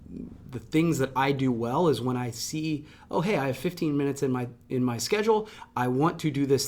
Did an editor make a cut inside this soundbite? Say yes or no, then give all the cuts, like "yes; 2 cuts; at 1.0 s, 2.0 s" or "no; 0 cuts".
no; 0 cuts